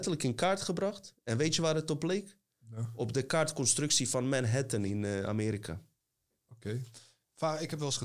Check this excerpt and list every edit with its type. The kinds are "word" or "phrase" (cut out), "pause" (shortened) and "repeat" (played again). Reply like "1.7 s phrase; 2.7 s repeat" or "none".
none